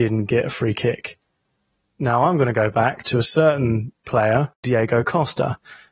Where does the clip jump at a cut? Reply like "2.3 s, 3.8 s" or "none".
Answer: none